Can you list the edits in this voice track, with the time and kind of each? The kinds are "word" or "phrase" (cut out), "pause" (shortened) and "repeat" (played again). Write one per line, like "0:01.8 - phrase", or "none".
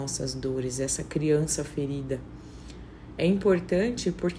none